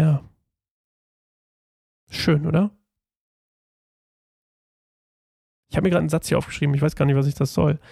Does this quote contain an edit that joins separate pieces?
no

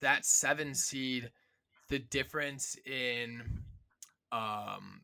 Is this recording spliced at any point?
no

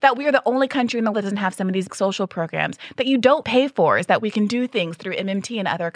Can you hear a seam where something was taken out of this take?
yes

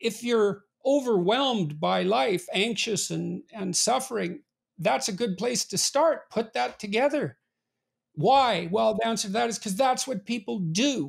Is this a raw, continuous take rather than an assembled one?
yes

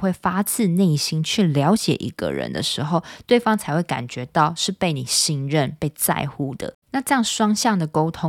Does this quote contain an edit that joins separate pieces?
yes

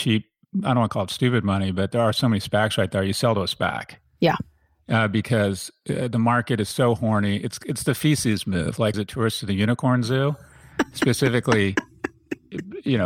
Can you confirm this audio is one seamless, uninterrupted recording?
no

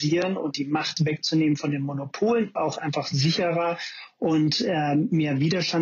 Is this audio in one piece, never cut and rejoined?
no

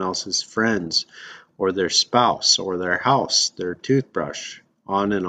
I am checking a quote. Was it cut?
no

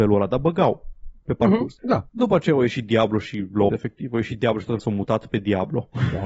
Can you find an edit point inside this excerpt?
yes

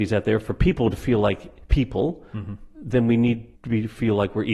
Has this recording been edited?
yes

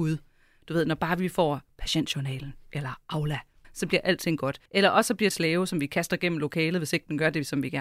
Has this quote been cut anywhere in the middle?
yes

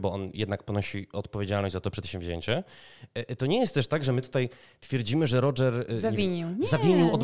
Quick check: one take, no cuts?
yes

